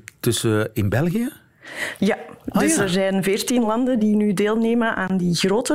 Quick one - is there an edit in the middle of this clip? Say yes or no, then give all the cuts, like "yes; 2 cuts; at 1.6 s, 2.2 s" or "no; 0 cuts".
no; 0 cuts